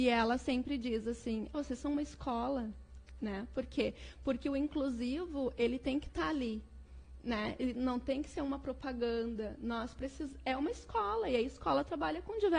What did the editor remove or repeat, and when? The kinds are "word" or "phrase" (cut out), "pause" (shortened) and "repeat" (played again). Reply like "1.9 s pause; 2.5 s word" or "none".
1.5 s word